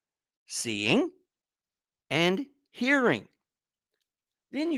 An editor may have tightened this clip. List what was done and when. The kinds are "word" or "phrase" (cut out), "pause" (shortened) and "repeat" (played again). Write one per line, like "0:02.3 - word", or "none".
none